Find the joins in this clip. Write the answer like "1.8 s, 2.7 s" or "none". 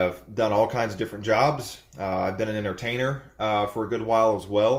none